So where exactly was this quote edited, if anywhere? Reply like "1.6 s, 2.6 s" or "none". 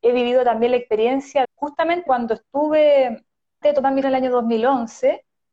1.4 s, 2.1 s, 3.6 s, 4.0 s

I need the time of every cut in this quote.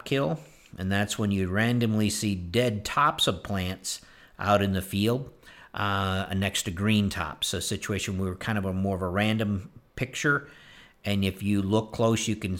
none

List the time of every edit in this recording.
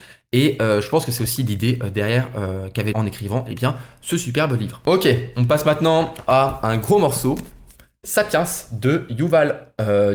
2.9 s

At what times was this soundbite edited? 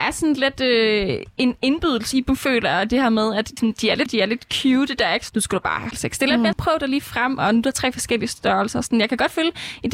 2.1 s, 3.6 s, 4.1 s, 5.3 s, 5.9 s, 6.5 s

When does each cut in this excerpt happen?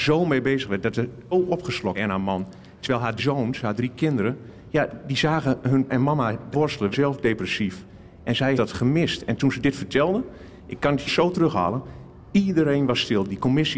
1.3 s, 2.0 s, 3.2 s, 5.9 s, 6.5 s, 6.9 s, 8.6 s, 9.4 s, 11.1 s

